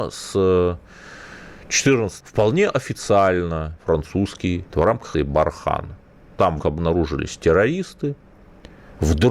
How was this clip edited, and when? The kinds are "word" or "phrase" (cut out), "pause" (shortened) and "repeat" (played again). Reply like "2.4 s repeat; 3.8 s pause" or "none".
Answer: 2.2 s word; 3.8 s word; 4.7 s word; 5.1 s word; 6.6 s word